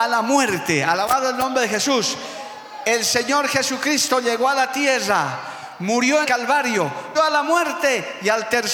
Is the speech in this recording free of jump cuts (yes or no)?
no